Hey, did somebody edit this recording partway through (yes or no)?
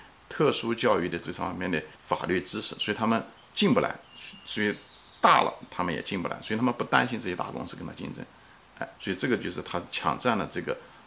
yes